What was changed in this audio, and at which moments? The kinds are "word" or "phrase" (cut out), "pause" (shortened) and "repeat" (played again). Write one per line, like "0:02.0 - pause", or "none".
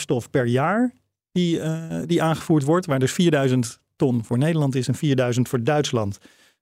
none

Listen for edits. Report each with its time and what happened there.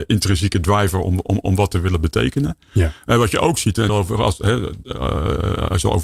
0:03.9 - phrase

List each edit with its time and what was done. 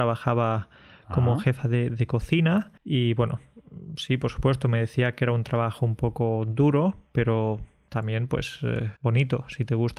0:02.8 - pause
0:09.0 - pause

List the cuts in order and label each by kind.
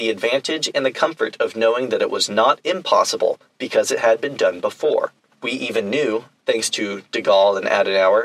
0:05.3 - pause

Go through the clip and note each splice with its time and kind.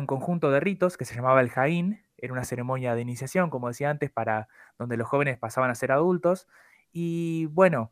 none

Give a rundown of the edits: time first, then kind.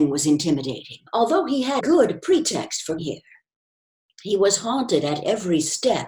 0:01.1 - pause
0:01.8 - word
0:03.0 - word

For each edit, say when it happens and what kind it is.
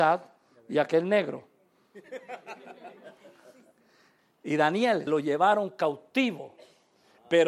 0:05.1 - word

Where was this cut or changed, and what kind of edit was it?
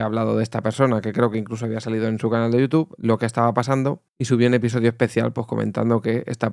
0:04.1 - pause

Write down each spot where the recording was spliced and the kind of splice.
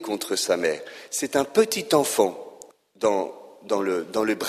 0:02.7 - pause

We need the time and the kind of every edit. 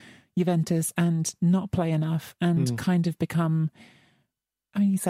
none

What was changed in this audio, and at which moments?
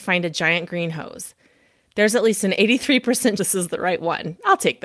0:03.4 - word

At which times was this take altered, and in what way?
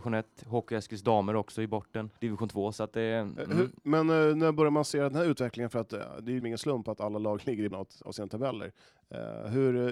0:02.2 - pause
0:06.4 - word
0:07.7 - word

